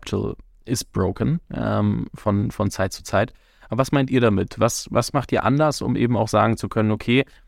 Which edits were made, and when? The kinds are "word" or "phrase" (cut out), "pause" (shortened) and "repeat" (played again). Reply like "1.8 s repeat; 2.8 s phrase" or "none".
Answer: none